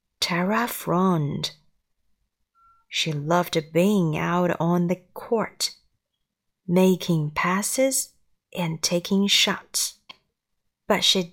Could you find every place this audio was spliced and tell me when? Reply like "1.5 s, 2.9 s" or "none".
none